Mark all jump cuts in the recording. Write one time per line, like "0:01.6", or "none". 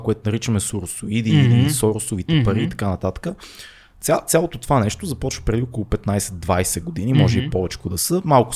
none